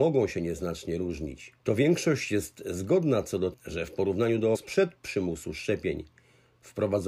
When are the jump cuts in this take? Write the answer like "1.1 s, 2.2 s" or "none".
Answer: 1.6 s, 3.5 s, 4.5 s